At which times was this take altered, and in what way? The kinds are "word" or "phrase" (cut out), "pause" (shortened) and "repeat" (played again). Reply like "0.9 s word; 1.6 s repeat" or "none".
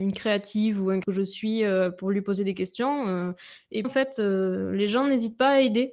1.0 s word; 3.8 s word